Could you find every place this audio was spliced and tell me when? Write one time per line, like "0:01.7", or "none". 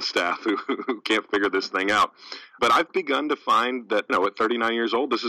0:02.6
0:04.1